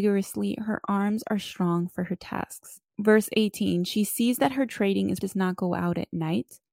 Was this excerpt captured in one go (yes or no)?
no